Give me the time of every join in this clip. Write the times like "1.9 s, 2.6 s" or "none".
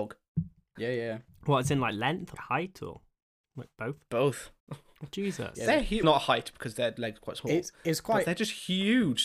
2.3 s, 4.6 s, 6.0 s